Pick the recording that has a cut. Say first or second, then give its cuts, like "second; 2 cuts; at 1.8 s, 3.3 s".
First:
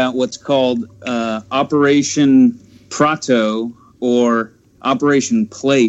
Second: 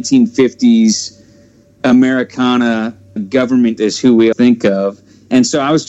second; 3 cuts; at 3.2 s, 3.8 s, 4.3 s